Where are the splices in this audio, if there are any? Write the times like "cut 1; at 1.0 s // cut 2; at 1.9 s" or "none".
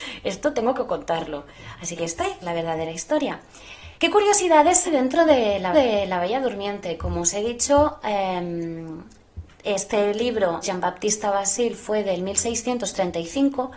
cut 1; at 2.0 s // cut 2; at 2.4 s // cut 3; at 3.9 s // cut 4; at 4.9 s // cut 5; at 5.7 s // cut 6; at 10.6 s